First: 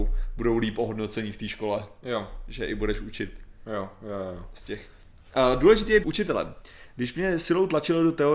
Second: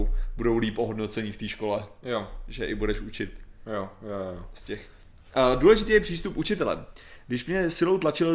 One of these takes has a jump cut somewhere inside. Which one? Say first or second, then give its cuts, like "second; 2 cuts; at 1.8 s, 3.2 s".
first; 1 cut; at 6.0 s